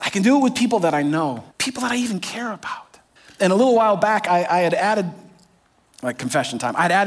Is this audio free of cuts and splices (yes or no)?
no